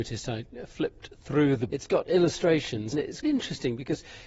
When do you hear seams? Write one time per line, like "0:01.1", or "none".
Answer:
0:01.7
0:02.9
0:03.2